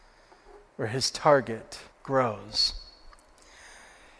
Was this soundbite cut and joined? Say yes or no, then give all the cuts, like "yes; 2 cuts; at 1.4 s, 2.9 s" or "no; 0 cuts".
yes; 1 cut; at 1.9 s